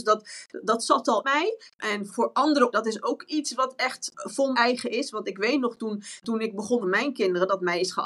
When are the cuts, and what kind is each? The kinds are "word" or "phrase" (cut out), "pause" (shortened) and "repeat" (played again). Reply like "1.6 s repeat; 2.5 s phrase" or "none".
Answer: 1.2 s word; 2.1 s word; 2.7 s word; 4.5 s word; 6.2 s word; 6.8 s word